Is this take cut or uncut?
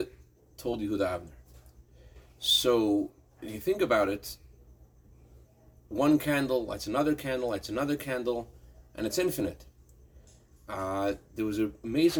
uncut